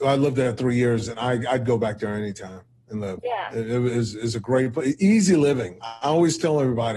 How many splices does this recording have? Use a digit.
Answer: 0